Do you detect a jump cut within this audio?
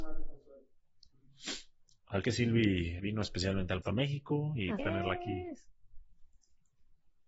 yes; 4 cuts; at 2.2 s, 3.0 s, 3.8 s, 4.8 s

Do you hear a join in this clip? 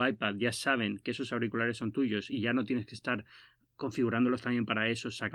no; 0 cuts

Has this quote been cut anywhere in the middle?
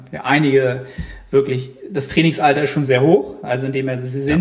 no; 0 cuts

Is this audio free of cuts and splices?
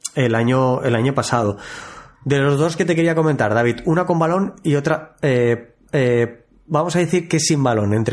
no; 2 cuts; at 2.8 s, 5.9 s

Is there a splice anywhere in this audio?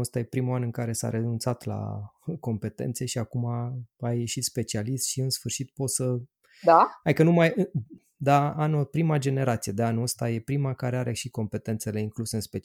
no; 0 cuts

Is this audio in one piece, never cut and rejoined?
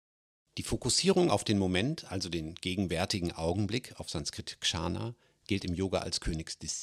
yes; 0 cuts

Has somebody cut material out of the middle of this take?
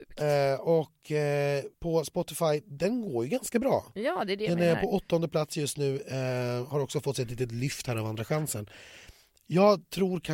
yes; 1 cut; at 1.7 s

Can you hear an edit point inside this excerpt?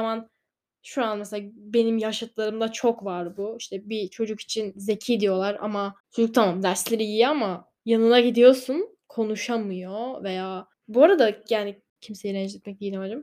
yes; 3 cuts; at 6.0 s, 7.8 s, 10.7 s

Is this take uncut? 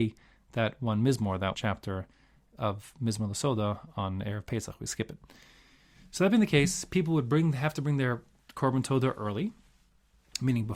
no; 1 cut; at 1.5 s

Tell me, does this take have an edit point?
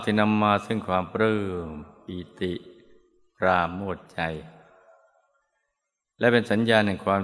no; 0 cuts

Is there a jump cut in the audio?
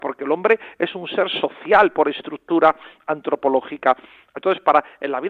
no; 0 cuts

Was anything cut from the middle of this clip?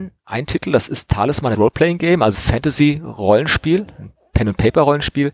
yes; 3 cuts; at 1.0 s, 1.5 s, 2.3 s

